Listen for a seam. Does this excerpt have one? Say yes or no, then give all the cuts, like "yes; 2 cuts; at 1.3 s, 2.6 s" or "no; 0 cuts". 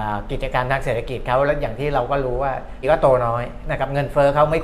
yes; 1 cut; at 2.8 s